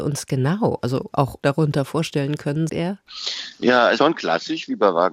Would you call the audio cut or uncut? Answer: cut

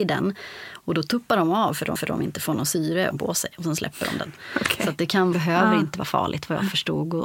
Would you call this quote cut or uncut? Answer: cut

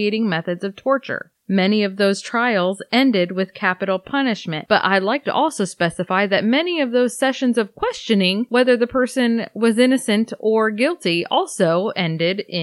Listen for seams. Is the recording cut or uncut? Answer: uncut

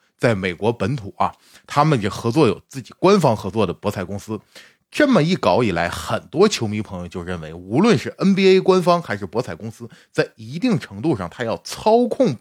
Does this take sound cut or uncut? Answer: uncut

